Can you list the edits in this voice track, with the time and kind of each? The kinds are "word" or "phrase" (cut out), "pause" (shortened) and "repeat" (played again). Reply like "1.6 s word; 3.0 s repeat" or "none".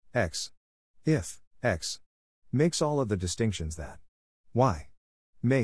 1.5 s pause